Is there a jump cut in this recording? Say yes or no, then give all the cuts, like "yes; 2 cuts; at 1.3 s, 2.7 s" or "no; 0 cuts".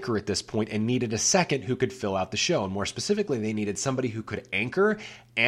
no; 0 cuts